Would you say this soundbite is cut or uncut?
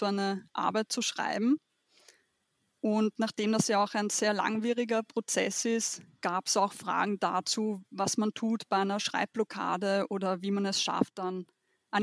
uncut